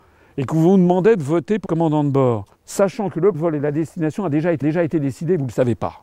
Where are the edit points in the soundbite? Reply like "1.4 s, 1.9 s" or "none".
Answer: 1.6 s, 2.5 s, 3.3 s, 4.6 s